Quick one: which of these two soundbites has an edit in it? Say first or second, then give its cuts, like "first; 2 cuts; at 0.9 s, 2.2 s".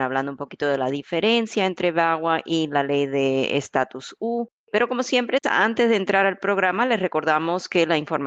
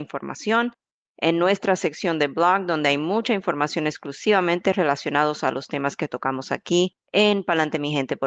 second; 1 cut; at 7.0 s